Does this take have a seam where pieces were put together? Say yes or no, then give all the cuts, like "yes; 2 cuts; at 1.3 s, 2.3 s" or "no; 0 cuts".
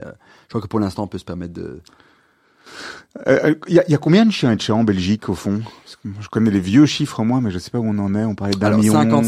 no; 0 cuts